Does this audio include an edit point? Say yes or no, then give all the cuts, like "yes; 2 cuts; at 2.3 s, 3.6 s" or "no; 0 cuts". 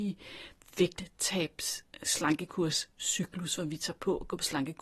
no; 0 cuts